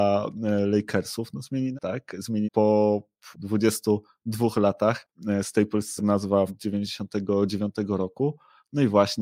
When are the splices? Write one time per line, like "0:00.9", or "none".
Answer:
0:01.7
0:02.4
0:03.3
0:06.0
0:06.5